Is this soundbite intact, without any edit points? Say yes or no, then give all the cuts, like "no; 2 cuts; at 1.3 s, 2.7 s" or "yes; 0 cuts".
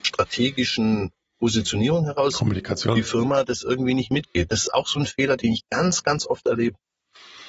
yes; 0 cuts